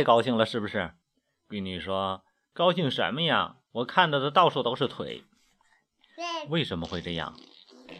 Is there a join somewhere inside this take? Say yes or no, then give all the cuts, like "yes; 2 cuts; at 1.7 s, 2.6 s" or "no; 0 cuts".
yes; 2 cuts; at 1.0 s, 3.7 s